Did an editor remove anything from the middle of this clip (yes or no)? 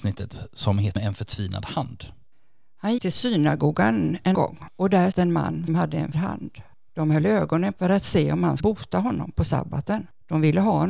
yes